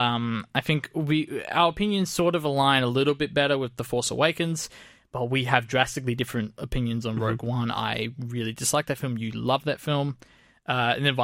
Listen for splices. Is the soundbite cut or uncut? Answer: uncut